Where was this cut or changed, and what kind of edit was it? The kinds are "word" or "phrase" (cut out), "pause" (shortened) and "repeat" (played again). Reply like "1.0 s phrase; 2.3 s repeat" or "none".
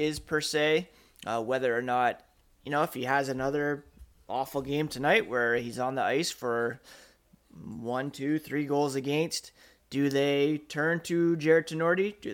none